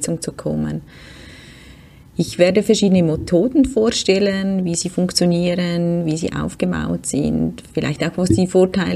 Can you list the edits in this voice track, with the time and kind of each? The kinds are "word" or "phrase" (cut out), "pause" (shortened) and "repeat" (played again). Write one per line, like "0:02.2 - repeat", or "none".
none

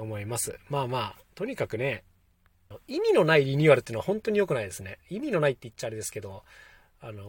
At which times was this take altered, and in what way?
0:01.2 - pause

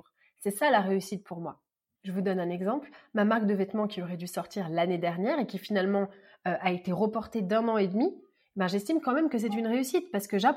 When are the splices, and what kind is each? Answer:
none

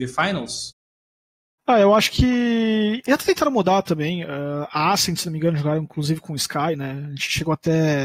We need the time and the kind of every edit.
none

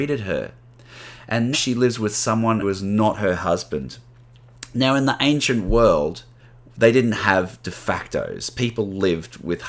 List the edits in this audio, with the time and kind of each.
0:01.5 - word
0:02.6 - word
0:06.4 - pause

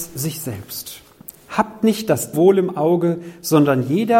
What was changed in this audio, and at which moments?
0:02.3 - word

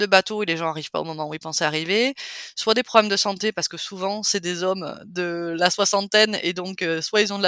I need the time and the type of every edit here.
none

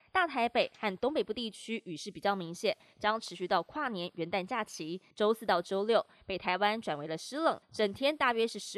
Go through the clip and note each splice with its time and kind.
0:05.1 - pause
0:07.6 - pause

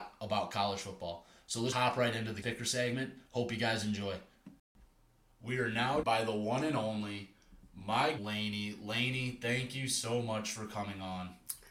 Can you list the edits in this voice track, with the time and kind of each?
0:01.7 - word
0:02.4 - word
0:06.0 - word
0:08.2 - word

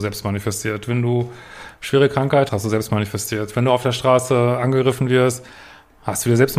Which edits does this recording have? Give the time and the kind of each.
0:02.5 - word

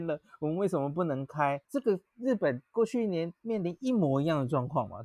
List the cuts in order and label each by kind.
0:01.6 - pause

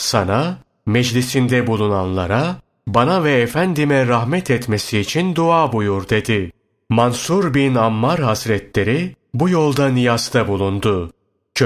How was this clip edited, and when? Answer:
none

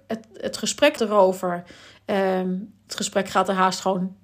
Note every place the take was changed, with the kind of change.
0:01.0 - word
0:02.9 - word

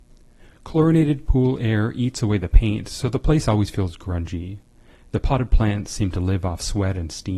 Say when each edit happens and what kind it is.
none

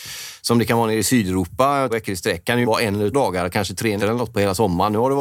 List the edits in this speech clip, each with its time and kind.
0:01.9 - word
0:02.6 - word
0:03.1 - word
0:04.0 - word

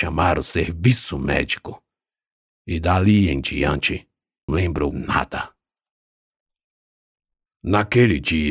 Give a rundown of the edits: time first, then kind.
0:04.5 - word
0:04.9 - word

